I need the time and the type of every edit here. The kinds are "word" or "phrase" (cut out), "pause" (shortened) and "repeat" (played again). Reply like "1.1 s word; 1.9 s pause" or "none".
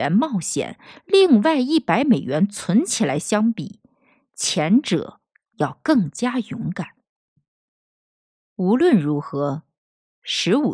none

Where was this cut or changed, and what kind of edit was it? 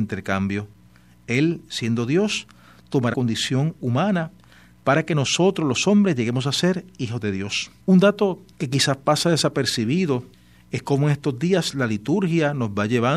3.1 s word; 7.8 s pause; 8.5 s pause; 10.3 s pause

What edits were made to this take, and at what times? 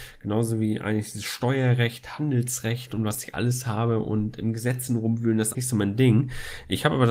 5.5 s word

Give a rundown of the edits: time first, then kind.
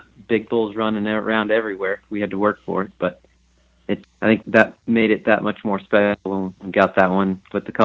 4.0 s word; 4.4 s word

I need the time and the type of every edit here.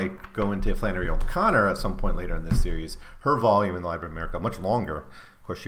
none

